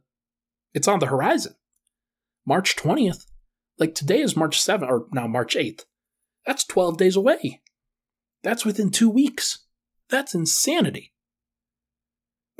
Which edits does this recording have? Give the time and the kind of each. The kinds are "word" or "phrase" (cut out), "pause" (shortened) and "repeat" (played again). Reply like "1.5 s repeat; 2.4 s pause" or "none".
none